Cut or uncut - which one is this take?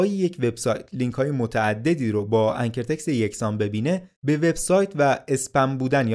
cut